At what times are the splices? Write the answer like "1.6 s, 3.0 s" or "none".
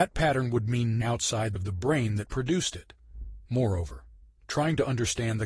1.0 s, 1.6 s, 3.5 s